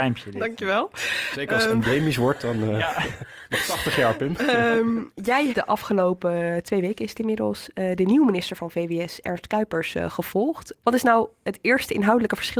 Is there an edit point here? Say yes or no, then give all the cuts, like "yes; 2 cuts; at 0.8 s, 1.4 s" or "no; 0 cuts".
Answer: yes; 1 cut; at 5.5 s